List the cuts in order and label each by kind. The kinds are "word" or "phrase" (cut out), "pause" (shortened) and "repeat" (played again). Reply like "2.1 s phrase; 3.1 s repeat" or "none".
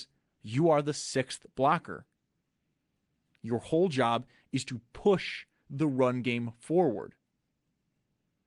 none